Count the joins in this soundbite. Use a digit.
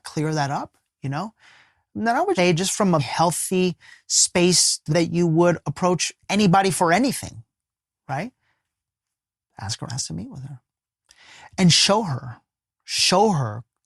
4